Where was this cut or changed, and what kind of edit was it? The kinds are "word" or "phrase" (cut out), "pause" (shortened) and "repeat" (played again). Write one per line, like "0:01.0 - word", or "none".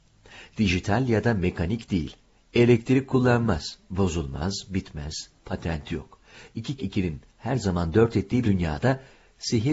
0:06.8 - word
0:08.4 - word